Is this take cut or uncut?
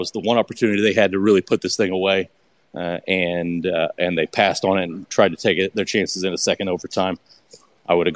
uncut